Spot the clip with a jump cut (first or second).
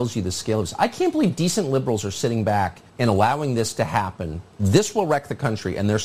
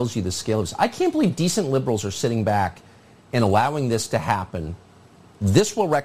first